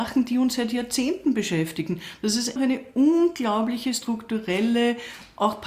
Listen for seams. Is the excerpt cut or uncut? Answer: cut